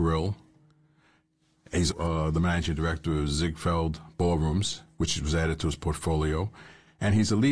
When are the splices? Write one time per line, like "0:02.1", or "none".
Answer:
0:01.9